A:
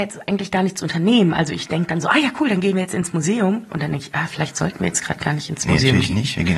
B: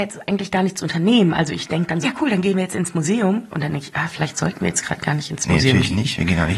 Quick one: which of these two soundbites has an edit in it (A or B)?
B